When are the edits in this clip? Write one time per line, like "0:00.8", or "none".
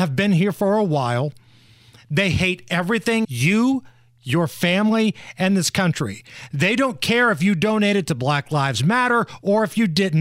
0:03.2